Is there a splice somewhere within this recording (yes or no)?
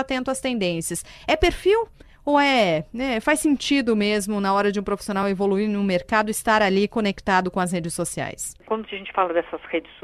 no